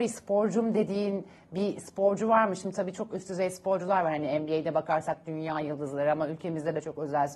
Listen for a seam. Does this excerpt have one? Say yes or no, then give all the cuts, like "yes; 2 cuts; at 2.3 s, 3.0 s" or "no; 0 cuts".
no; 0 cuts